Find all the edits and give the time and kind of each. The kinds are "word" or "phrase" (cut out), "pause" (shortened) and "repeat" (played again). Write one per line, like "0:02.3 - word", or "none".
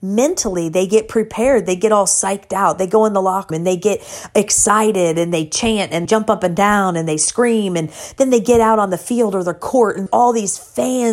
0:03.5 - word
0:06.1 - word
0:10.1 - word